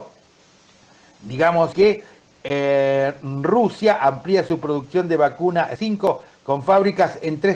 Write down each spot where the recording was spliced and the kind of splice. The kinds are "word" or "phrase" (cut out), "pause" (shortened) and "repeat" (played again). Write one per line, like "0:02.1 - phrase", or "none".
0:01.7 - word
0:05.8 - word